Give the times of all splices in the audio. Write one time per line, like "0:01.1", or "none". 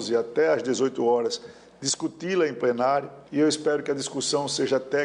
0:03.3